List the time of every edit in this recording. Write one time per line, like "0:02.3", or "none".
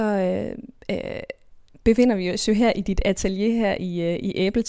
none